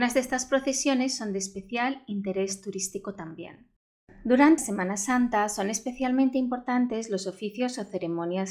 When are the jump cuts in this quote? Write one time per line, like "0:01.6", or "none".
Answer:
0:04.6